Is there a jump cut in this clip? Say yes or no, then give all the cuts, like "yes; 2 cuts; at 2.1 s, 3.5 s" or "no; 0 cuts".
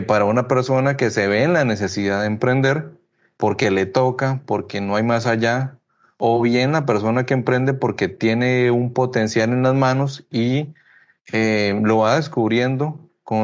no; 0 cuts